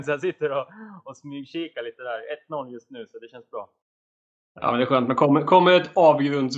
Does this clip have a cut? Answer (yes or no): no